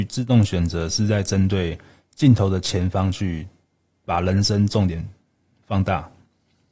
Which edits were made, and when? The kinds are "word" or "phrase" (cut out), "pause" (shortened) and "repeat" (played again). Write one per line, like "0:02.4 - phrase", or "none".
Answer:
none